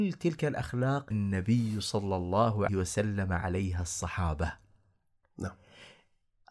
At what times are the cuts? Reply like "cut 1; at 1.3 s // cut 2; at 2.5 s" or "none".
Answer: cut 1; at 1.1 s // cut 2; at 2.7 s